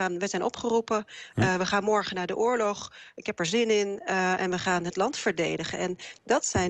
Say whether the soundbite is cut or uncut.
uncut